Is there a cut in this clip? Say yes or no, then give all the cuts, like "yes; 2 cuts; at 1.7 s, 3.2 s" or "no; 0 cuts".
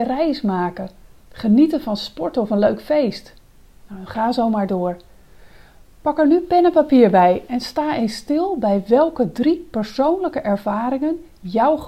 no; 0 cuts